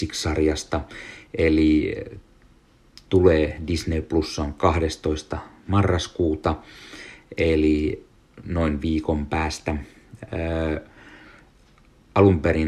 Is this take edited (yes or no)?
no